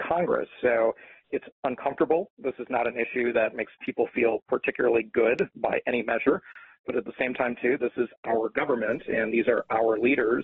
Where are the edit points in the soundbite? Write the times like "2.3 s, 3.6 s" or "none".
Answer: none